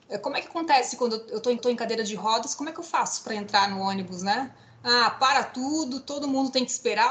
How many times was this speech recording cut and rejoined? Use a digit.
1